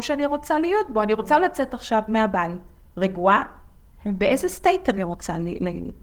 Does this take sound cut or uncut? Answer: uncut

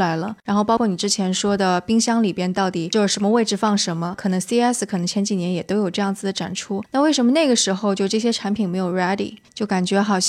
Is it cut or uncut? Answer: uncut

